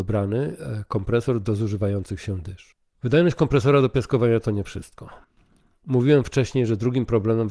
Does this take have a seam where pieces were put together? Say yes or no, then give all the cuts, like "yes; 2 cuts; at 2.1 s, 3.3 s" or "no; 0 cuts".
no; 0 cuts